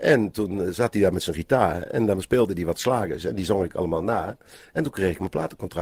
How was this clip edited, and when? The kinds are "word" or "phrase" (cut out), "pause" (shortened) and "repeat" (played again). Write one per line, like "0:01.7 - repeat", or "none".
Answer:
none